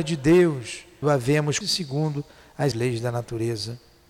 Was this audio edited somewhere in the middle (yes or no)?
yes